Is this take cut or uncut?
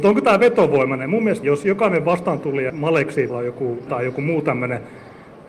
cut